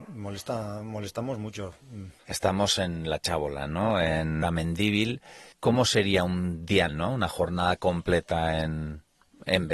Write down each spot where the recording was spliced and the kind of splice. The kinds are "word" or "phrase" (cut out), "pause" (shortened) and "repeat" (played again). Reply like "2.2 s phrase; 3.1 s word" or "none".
2.2 s pause; 4.4 s word; 5.5 s pause; 6.9 s word